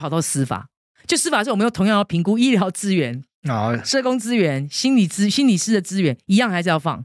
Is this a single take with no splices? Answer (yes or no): yes